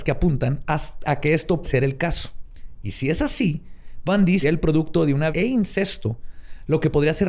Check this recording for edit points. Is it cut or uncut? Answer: cut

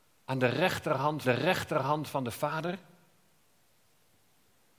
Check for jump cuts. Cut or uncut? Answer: cut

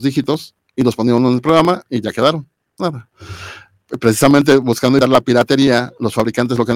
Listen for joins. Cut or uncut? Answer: cut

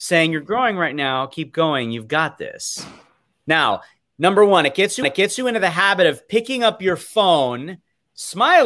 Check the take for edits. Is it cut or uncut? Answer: cut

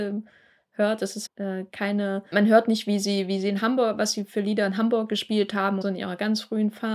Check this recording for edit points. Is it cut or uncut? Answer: cut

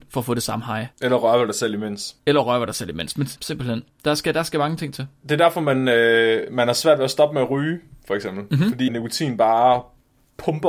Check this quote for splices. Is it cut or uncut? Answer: cut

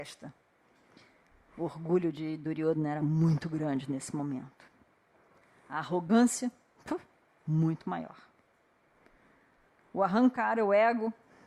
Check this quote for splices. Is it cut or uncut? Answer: uncut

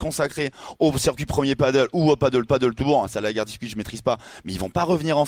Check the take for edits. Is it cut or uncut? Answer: cut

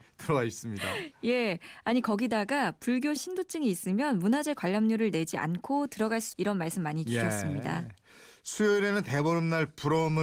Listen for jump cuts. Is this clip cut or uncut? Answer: cut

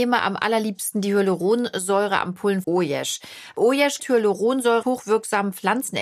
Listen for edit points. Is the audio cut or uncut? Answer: cut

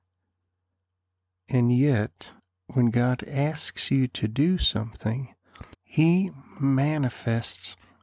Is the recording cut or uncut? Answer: cut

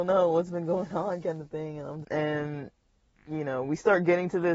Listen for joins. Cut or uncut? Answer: cut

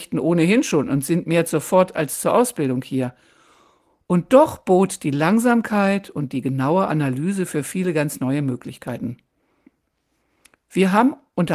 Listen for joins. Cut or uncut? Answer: uncut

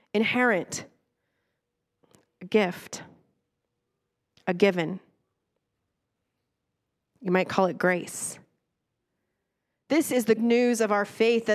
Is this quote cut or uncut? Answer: cut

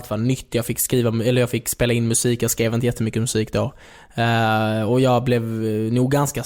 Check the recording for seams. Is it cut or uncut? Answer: uncut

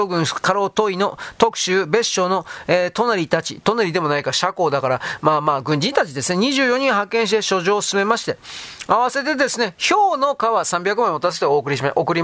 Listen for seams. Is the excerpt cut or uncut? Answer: uncut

